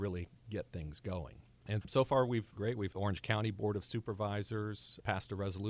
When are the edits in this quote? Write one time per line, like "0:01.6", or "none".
0:01.8
0:02.6
0:02.9

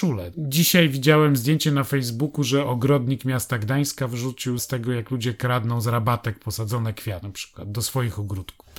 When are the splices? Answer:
0:04.6

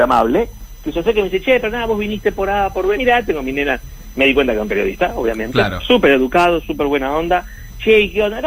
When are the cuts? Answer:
0:03.0

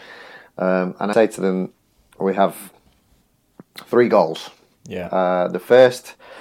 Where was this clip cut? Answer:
0:01.1
0:04.8

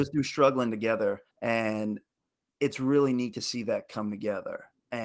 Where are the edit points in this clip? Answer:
0:01.3

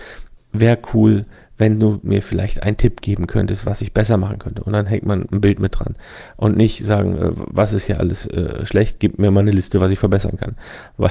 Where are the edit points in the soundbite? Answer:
none

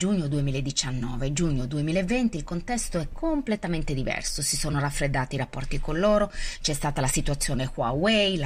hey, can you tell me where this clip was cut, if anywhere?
none

